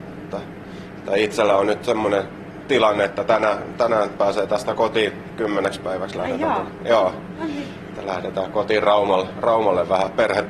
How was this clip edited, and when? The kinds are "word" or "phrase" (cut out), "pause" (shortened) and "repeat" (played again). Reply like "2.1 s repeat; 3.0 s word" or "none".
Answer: none